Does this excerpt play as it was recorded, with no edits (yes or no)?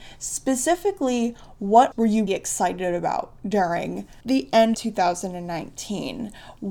no